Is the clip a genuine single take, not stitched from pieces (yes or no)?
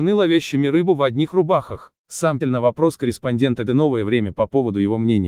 no